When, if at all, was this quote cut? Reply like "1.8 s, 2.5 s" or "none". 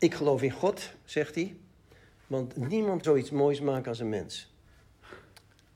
3.0 s